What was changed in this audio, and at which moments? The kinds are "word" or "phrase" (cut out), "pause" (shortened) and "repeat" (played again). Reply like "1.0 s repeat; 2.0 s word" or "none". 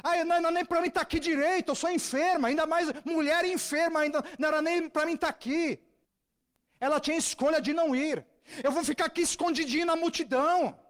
6.0 s pause